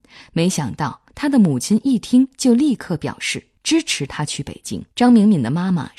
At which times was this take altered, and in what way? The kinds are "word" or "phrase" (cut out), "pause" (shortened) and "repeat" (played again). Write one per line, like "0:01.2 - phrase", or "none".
0:01.1 - pause
0:03.5 - pause
0:04.9 - pause